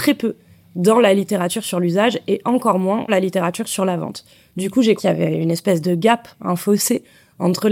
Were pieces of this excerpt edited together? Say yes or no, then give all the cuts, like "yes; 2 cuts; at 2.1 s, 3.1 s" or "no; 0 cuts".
yes; 2 cuts; at 3.1 s, 5.0 s